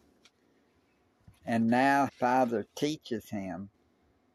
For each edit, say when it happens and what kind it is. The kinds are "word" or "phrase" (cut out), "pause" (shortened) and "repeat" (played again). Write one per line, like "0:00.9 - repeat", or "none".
0:02.1 - word